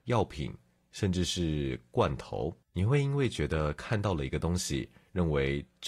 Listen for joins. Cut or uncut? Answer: cut